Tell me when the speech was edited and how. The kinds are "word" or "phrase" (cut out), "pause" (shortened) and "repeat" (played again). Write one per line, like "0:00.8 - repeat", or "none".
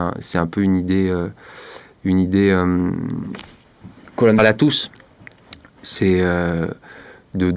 0:04.4 - word